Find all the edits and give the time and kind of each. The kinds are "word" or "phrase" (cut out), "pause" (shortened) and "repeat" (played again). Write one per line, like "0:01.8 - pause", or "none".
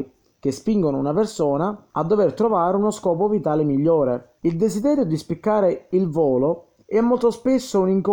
0:01.9 - pause
0:04.4 - pause
0:06.8 - pause